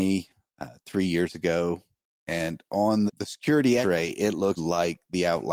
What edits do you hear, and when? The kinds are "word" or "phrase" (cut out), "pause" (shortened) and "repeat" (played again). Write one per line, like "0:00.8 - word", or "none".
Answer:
0:02.0 - pause
0:03.1 - word
0:03.8 - word
0:04.6 - word